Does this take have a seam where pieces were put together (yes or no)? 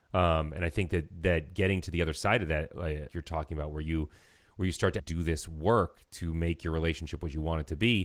yes